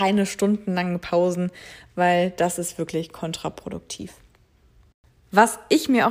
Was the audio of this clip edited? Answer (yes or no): no